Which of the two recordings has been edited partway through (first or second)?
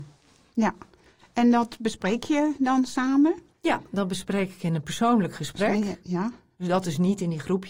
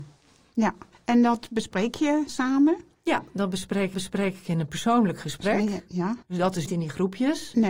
second